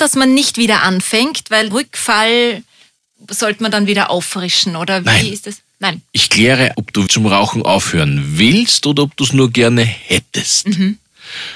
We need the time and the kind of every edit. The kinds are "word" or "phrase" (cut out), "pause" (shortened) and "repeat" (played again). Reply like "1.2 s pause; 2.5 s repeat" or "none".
1.7 s word; 5.0 s word; 6.7 s word; 7.1 s word